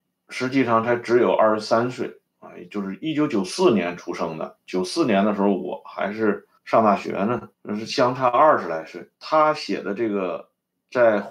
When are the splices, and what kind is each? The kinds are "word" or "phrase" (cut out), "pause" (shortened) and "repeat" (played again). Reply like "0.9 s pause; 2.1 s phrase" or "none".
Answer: 2.3 s pause; 6.6 s pause; 7.5 s pause; 9.1 s pause